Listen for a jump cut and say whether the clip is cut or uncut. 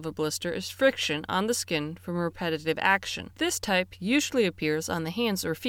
cut